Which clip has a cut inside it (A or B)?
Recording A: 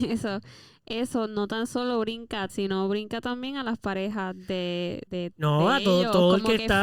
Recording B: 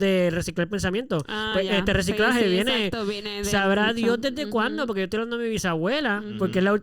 A